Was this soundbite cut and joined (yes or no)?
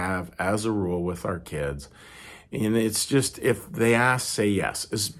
no